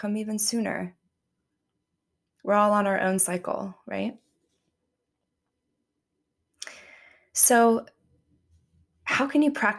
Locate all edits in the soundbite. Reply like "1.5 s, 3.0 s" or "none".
none